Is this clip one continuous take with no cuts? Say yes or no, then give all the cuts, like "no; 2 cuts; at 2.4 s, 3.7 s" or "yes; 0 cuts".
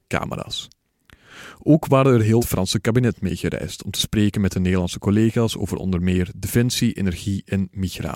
no; 1 cut; at 2.4 s